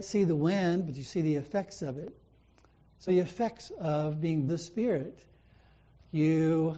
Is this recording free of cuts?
no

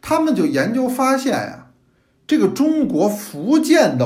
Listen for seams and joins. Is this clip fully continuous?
yes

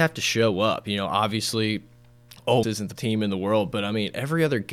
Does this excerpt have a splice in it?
yes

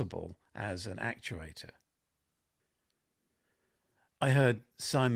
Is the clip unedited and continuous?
yes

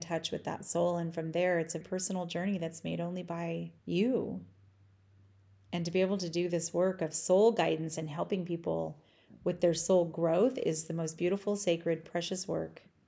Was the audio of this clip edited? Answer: yes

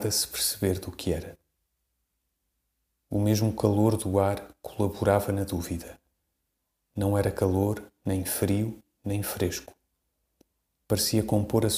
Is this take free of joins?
yes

